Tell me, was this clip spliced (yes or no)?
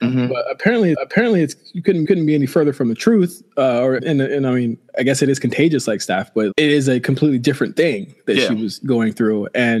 yes